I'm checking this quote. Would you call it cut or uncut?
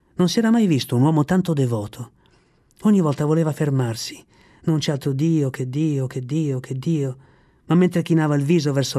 uncut